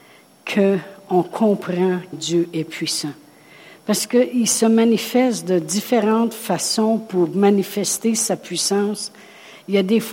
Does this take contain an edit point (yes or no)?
yes